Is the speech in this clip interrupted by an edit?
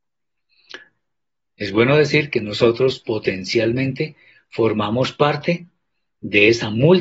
no; 0 cuts

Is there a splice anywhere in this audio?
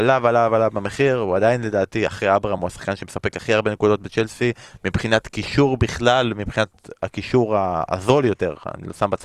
no; 0 cuts

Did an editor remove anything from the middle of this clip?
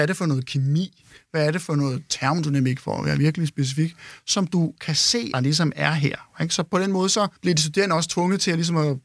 yes; 2 cuts; at 5.3 s, 7.4 s

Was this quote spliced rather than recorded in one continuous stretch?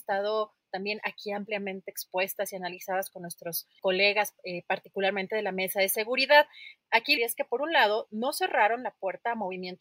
yes; 2 cuts; at 3.8 s, 7.2 s

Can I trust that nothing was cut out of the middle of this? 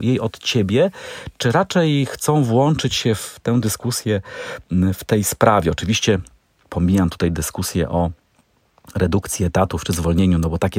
yes; 0 cuts

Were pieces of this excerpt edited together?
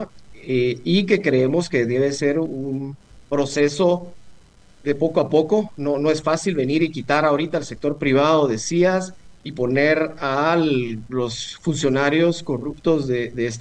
no; 0 cuts

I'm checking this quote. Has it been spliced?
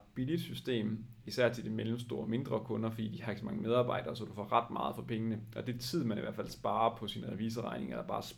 no; 0 cuts

